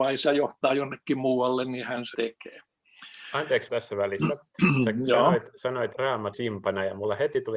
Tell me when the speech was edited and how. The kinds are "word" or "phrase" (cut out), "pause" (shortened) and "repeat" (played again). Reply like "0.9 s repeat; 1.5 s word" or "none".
2.1 s word; 3.7 s word; 5.9 s word; 6.3 s word